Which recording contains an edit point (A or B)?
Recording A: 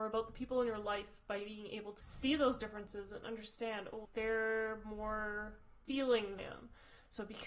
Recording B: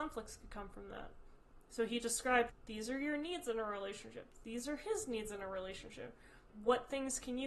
A